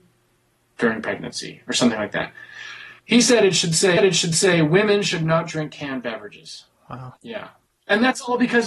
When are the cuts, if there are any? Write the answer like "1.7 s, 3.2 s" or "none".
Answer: 3.0 s, 4.0 s, 7.2 s